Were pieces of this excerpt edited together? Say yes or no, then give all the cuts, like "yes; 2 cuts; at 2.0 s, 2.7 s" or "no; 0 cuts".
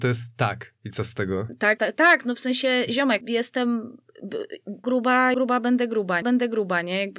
yes; 5 cuts; at 1.8 s, 3.2 s, 4.8 s, 5.3 s, 6.2 s